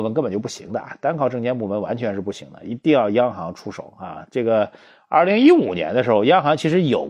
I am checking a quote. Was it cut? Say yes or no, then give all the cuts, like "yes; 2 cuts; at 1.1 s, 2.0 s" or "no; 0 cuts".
no; 0 cuts